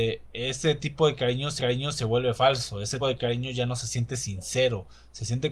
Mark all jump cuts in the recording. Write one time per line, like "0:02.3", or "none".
0:01.6
0:03.0